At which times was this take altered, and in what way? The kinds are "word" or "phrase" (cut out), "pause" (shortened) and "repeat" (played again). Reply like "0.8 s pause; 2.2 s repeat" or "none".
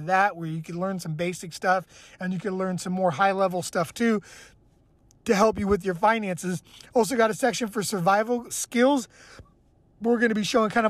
8.5 s word